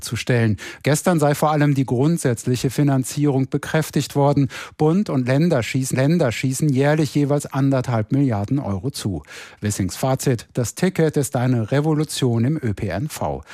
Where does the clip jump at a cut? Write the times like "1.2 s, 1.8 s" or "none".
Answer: 5.9 s

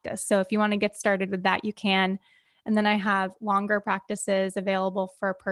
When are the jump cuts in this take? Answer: none

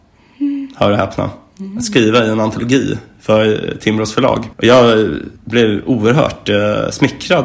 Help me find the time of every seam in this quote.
4.5 s, 5.4 s

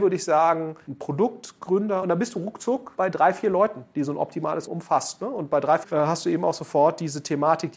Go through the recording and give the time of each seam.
2.0 s, 4.7 s, 5.8 s

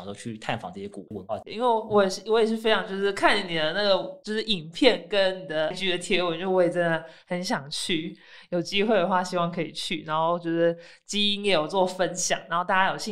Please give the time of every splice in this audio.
5.7 s

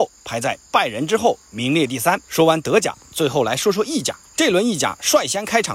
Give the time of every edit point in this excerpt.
2.2 s, 4.2 s

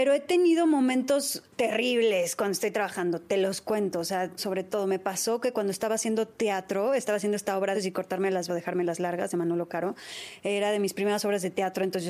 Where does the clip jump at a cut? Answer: 1.5 s, 4.4 s, 7.7 s, 8.5 s

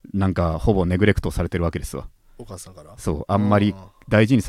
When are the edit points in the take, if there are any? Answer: none

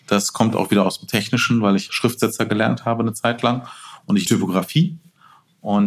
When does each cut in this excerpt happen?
1.9 s, 4.3 s

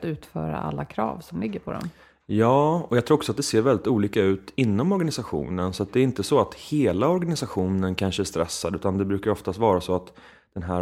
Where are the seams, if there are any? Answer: none

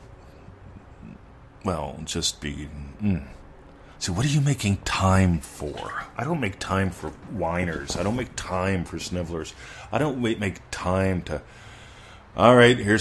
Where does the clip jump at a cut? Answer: 3.9 s

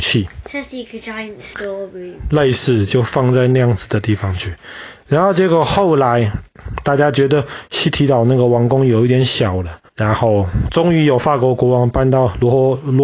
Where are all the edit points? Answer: 9.9 s

